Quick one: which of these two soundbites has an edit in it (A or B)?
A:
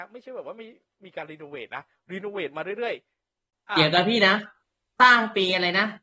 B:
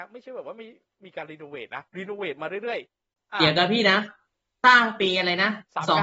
B